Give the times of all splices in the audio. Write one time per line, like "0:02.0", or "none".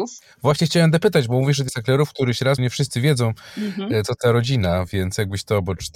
0:01.7
0:02.6
0:04.2